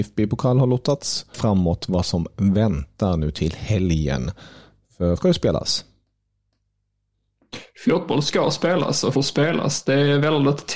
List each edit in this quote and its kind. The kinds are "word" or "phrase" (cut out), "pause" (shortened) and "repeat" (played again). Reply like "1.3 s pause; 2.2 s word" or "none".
1.3 s phrase; 5.2 s word; 9.2 s word